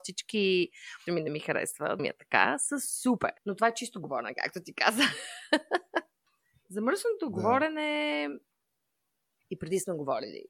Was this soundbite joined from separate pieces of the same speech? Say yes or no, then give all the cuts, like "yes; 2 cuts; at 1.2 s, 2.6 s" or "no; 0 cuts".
yes; 3 cuts; at 1.1 s, 2.0 s, 3.4 s